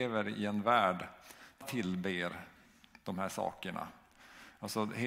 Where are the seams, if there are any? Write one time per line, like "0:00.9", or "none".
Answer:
0:01.6